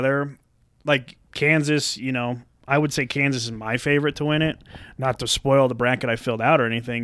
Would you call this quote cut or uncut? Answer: uncut